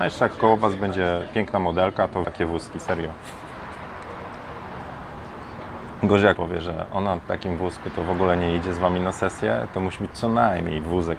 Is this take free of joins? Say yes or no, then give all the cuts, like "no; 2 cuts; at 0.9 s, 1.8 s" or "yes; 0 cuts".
no; 3 cuts; at 2.2 s, 6.3 s, 7.3 s